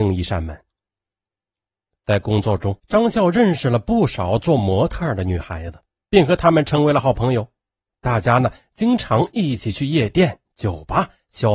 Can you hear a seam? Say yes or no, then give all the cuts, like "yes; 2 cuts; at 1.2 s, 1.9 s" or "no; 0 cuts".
yes; 1 cut; at 2.8 s